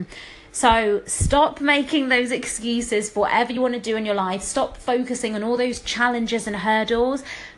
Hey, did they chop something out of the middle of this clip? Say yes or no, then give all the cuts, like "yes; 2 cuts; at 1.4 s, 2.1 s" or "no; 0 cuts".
no; 0 cuts